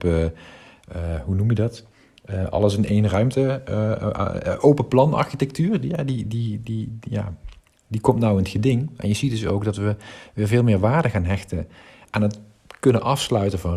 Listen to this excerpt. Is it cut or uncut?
uncut